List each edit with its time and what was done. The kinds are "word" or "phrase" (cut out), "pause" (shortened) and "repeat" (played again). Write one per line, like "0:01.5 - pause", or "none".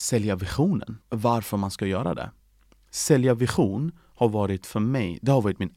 0:01.0 - pause